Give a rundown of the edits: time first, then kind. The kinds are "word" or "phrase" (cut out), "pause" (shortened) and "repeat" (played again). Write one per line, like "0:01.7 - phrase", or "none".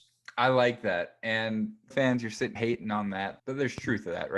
0:01.9 - word
0:02.6 - word
0:03.4 - word